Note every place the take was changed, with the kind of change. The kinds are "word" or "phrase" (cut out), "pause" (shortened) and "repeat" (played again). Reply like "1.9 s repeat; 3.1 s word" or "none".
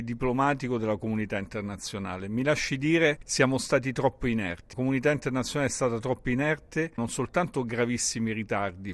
3.2 s word; 4.7 s word; 7.0 s phrase